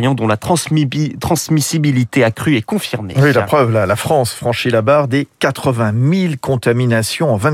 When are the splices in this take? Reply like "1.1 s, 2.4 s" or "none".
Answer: none